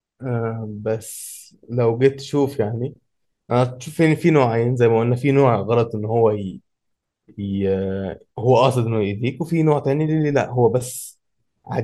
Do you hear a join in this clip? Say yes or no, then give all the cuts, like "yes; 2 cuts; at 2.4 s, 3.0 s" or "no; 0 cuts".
no; 0 cuts